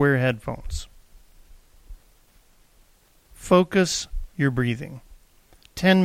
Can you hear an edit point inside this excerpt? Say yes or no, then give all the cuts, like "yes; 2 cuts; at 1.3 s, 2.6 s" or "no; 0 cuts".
yes; 1 cut; at 4.3 s